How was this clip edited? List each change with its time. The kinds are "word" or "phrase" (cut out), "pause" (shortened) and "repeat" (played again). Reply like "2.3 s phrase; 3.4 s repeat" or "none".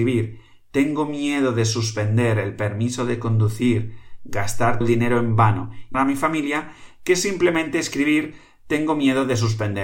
4.8 s word; 5.9 s word